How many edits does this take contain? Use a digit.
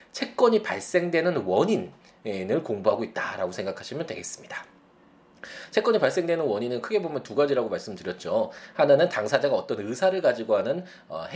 0